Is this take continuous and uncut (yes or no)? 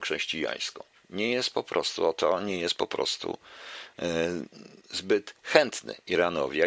yes